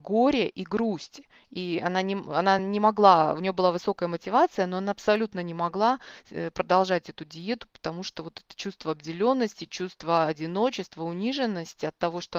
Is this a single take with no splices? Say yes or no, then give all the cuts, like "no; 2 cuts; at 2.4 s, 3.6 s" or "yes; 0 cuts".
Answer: yes; 0 cuts